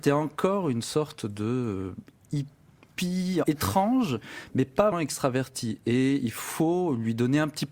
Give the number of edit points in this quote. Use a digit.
2